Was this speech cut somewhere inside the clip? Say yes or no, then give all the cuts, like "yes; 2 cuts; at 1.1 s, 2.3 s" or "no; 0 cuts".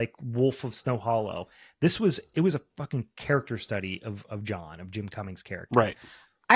no; 0 cuts